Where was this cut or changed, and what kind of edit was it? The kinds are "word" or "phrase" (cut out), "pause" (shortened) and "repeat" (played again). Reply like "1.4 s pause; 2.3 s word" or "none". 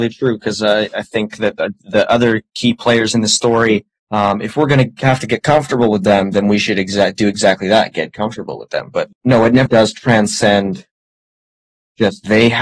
4.0 s pause; 9.1 s word; 9.7 s word